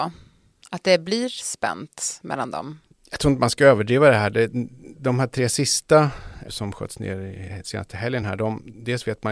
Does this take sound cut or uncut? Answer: uncut